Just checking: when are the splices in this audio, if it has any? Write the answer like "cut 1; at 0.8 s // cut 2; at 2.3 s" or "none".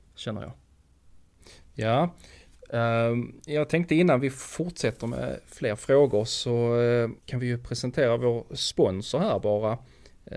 cut 1; at 7.2 s